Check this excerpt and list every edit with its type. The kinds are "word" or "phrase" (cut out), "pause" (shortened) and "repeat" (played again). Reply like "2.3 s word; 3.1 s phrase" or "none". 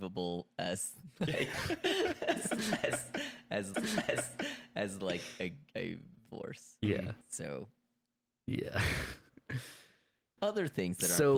3.7 s repeat; 5.7 s phrase; 6.3 s word; 7.2 s pause; 10.4 s word

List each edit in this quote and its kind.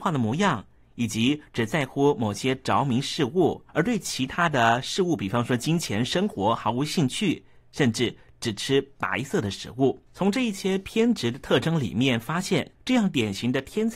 3.7 s pause; 10.1 s pause; 12.7 s pause

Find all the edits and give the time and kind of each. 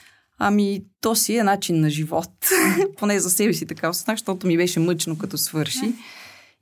0.9 s pause

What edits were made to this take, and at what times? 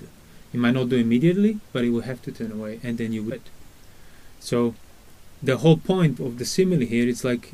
3.3 s word; 5.3 s pause; 6.2 s word

